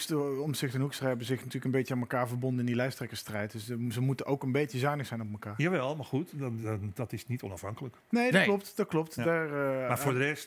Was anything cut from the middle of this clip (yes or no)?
no